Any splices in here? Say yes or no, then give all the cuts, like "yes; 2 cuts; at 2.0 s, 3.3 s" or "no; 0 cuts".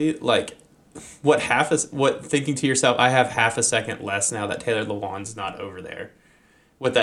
no; 0 cuts